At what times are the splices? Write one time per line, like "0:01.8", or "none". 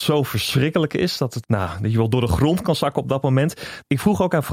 0:01.4